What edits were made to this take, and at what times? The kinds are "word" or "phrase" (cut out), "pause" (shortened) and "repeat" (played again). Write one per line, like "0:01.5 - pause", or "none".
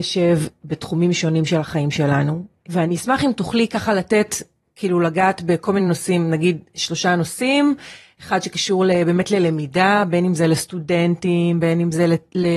none